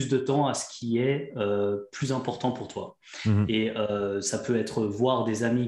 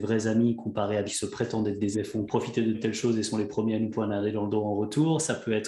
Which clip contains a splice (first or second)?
second